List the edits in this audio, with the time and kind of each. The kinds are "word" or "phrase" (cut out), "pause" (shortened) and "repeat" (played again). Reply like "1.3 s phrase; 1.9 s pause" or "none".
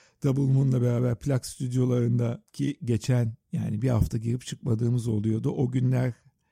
2.5 s pause; 3.4 s pause